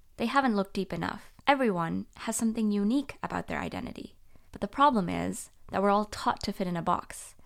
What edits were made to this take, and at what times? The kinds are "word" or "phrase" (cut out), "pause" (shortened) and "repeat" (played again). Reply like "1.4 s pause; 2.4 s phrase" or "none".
1.4 s pause; 4.5 s pause

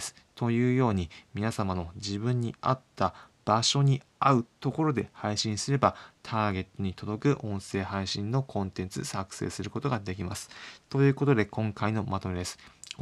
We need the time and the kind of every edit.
4.1 s pause

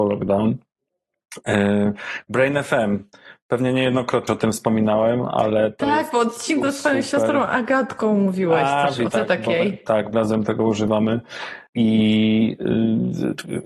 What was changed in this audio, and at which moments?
4.3 s word; 6.6 s word; 9.1 s phrase; 10.1 s word; 11.7 s pause

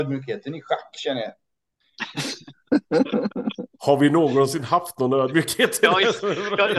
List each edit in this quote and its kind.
none

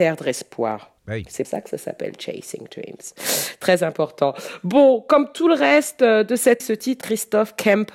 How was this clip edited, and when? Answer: 1.0 s pause; 1.4 s word; 6.6 s word; 7.0 s phrase

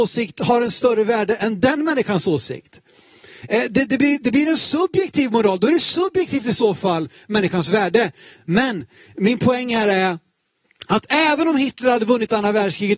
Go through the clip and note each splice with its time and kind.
none

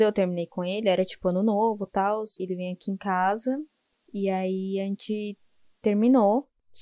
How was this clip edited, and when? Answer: 2.4 s word

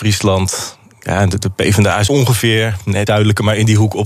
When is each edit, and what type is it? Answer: 2.1 s word; 3.1 s word

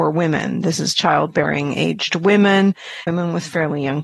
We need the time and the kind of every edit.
3.1 s word

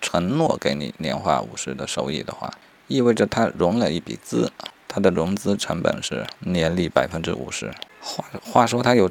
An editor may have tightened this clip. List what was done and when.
none

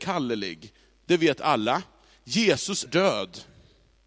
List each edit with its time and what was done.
2.9 s word

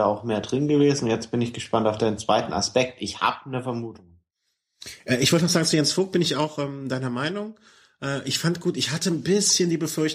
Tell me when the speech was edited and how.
none

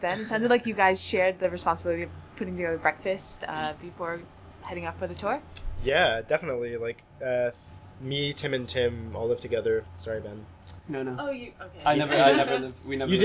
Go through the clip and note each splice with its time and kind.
none

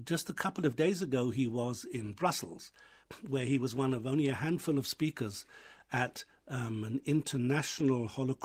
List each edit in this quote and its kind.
none

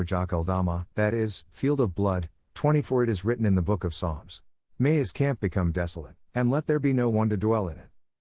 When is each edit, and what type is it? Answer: 0.9 s pause; 4.5 s pause; 6.2 s pause

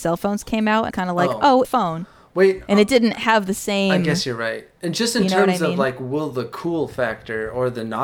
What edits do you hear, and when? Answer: 0.9 s phrase; 1.6 s phrase

